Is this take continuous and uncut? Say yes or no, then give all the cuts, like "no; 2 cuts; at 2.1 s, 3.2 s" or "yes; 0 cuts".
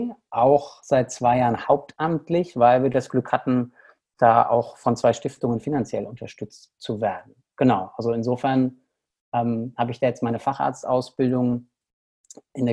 yes; 0 cuts